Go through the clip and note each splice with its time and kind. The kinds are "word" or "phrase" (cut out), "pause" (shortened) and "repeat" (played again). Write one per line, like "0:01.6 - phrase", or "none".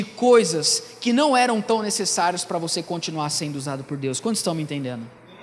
none